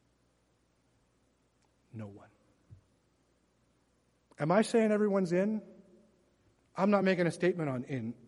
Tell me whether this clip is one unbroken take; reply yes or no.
yes